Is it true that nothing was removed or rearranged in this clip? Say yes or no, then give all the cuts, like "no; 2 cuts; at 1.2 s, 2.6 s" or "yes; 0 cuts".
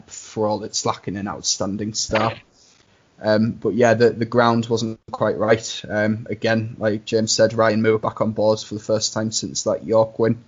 yes; 0 cuts